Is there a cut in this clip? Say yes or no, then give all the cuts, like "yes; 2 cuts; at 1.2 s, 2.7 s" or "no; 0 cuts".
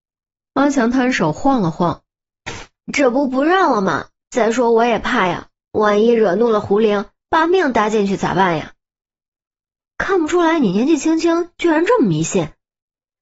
no; 0 cuts